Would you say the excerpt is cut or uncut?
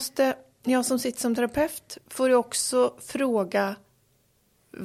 uncut